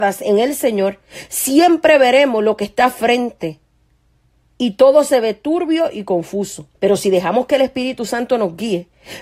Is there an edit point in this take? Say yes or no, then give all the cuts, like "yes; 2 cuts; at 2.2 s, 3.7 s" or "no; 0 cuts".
yes; 1 cut; at 6.7 s